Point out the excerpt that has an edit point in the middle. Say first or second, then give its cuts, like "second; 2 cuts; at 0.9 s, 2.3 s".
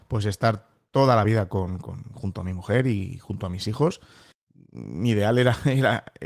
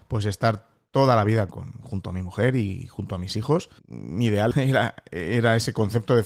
second; 3 cuts; at 1.5 s, 3.8 s, 4.5 s